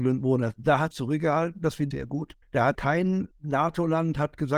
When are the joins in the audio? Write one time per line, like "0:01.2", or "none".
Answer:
0:00.9
0:01.9
0:02.4
0:02.7
0:03.3